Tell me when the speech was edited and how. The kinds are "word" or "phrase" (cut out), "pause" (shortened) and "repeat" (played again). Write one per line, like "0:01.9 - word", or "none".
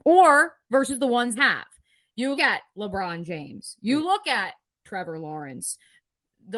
0:01.4 - word
0:02.4 - word